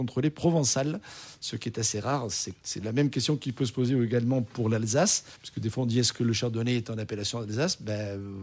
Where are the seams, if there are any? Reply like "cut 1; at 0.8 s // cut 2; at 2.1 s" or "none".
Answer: cut 1; at 5.3 s